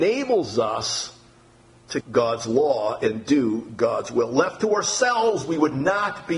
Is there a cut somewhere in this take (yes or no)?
yes